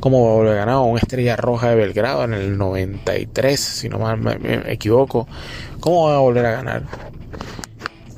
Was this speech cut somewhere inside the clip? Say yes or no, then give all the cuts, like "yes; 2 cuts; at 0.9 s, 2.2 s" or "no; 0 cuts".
no; 0 cuts